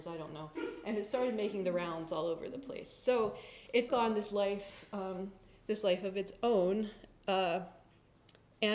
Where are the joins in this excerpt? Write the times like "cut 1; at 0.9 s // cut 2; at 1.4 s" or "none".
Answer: cut 1; at 3.9 s